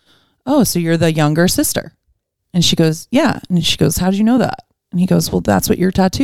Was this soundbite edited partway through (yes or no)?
no